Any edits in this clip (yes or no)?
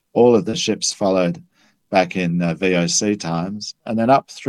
no